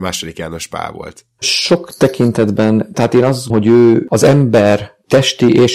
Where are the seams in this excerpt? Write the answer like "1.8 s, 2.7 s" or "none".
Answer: 2.9 s, 3.5 s